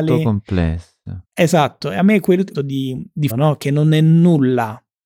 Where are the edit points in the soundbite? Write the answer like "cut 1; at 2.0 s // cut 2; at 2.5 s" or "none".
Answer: cut 1; at 1.2 s // cut 2; at 2.5 s // cut 3; at 3.3 s